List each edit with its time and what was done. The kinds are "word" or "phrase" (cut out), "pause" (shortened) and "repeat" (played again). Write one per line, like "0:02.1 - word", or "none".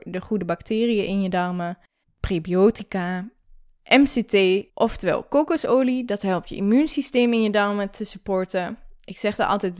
0:02.0 - pause
0:04.7 - pause